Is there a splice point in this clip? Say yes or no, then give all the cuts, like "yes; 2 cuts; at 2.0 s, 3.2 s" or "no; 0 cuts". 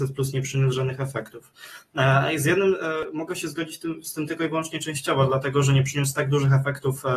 no; 0 cuts